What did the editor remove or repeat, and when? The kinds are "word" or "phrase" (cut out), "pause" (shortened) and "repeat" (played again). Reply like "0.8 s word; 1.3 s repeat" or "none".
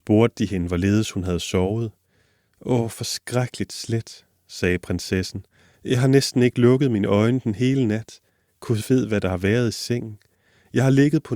none